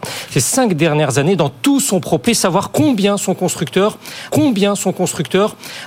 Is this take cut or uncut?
cut